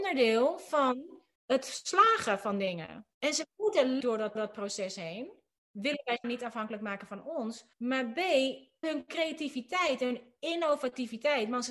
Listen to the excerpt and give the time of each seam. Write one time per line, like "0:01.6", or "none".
0:01.4
0:03.1
0:04.0
0:04.4
0:06.2
0:07.7
0:08.8